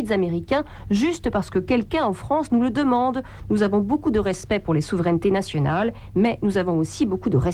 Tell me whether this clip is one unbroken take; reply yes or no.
yes